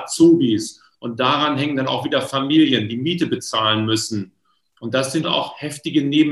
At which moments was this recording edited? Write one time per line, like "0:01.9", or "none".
0:05.2

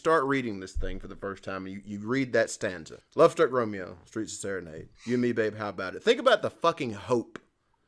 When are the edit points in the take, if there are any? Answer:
0:03.0
0:04.9

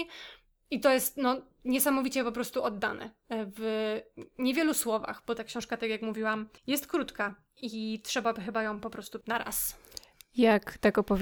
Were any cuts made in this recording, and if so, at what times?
0:06.6
0:09.2

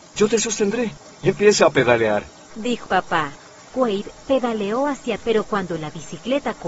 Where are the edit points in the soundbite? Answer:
0:02.9
0:05.2

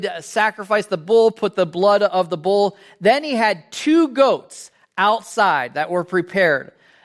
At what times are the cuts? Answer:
none

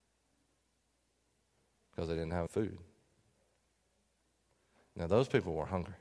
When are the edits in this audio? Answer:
0:02.5

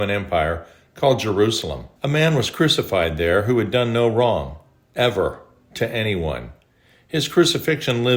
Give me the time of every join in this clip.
0:02.0

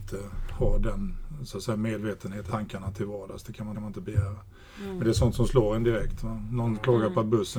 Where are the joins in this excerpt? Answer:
0:02.5
0:03.7

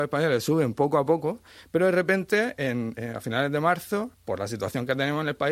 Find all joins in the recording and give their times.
0:04.1

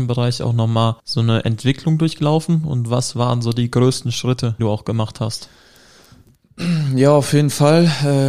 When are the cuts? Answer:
0:01.0
0:04.6

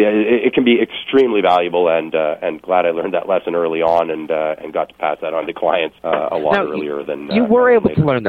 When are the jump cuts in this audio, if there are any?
0:06.0

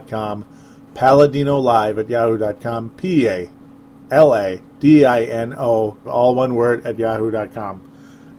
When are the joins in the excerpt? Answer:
0:04.7
0:06.0

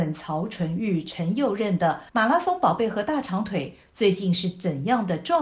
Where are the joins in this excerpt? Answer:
0:02.1

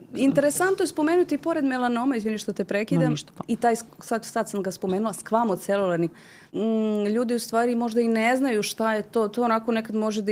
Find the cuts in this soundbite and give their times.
0:06.1
0:06.5

